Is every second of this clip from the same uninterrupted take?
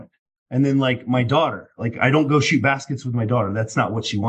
yes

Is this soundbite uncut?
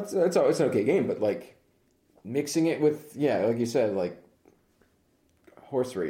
yes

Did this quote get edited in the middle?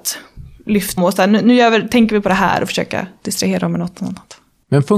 yes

